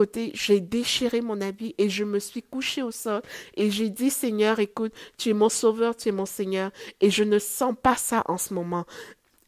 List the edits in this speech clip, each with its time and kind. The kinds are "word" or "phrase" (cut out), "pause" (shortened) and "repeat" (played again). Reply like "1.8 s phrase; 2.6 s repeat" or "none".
none